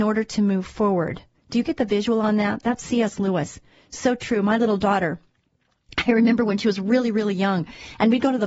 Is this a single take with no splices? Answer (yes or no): yes